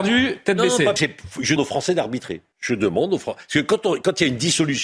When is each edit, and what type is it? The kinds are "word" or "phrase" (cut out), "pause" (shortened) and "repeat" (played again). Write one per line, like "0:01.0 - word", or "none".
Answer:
0:01.0 - word
0:01.6 - word
0:02.5 - pause